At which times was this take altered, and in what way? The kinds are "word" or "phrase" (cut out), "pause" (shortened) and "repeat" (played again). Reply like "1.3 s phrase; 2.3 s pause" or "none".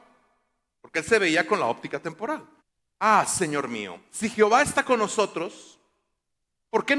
2.6 s pause